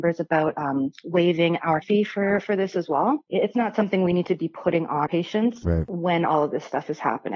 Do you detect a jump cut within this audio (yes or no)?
yes